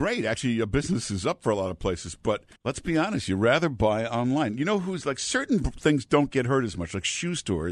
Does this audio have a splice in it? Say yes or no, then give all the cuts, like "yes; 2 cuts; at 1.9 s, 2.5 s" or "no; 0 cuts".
yes; 1 cut; at 2.6 s